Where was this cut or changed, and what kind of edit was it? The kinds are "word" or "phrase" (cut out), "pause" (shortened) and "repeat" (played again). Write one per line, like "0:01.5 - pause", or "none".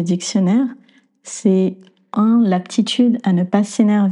0:02.1 - word